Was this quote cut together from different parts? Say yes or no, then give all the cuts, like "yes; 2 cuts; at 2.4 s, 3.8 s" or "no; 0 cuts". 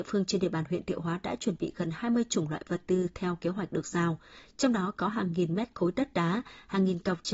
no; 0 cuts